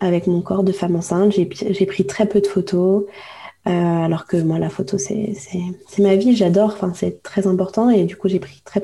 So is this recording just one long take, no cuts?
no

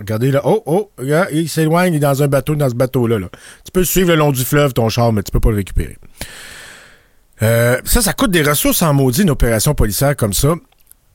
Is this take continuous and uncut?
yes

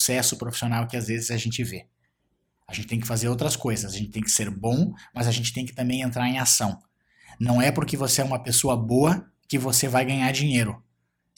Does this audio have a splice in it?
no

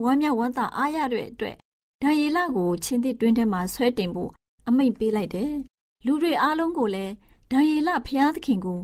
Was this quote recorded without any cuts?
yes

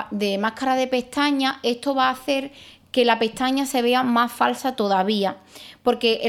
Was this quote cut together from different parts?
no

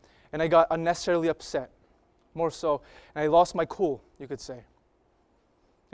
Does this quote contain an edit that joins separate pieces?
no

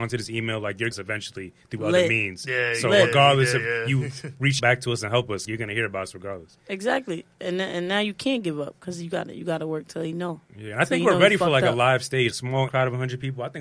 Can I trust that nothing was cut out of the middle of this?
no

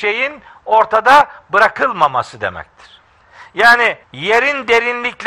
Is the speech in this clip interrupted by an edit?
yes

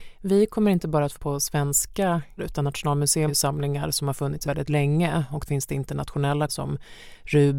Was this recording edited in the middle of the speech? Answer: yes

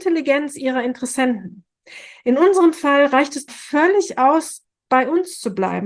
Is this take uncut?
no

